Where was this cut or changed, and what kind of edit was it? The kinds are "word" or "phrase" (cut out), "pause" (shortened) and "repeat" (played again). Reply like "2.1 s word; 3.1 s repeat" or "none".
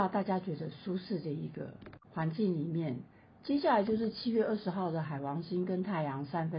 2.0 s pause